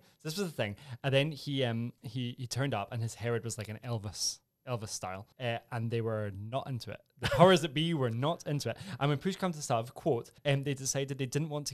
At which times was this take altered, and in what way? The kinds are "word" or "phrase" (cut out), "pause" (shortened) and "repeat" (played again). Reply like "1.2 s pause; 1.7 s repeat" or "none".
2.0 s pause; 5.3 s pause; 7.1 s pause; 10.4 s pause